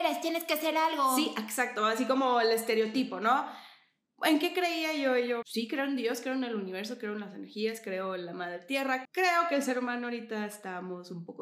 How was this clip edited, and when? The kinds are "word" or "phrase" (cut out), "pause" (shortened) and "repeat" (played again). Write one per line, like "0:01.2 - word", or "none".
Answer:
0:05.4 - word
0:09.0 - word